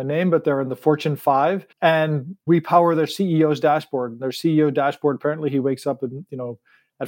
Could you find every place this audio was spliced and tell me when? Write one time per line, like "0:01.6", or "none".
0:01.7